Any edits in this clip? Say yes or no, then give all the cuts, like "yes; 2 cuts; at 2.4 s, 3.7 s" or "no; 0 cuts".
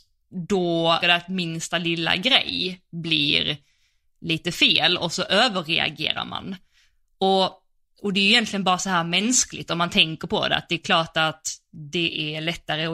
yes; 1 cut; at 1.0 s